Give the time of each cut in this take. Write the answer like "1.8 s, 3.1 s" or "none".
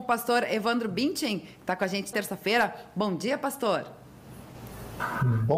2.1 s